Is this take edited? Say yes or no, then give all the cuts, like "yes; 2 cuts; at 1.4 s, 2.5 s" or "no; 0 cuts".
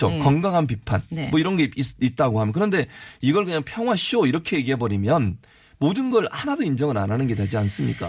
no; 0 cuts